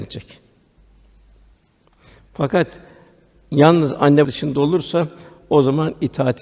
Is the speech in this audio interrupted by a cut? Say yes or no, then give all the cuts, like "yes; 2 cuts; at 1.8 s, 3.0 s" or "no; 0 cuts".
yes; 1 cut; at 4.2 s